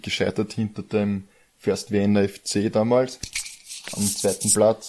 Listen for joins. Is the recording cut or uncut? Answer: uncut